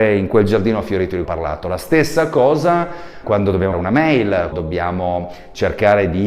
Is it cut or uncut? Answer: cut